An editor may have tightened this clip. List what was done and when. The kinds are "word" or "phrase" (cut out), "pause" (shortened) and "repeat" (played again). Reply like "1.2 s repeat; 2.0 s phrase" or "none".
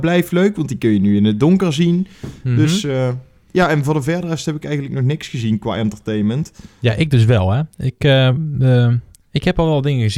none